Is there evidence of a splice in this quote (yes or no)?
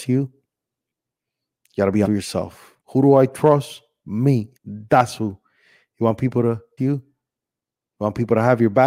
yes